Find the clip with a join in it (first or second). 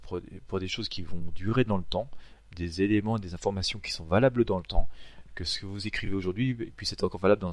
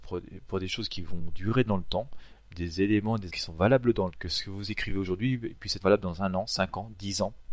second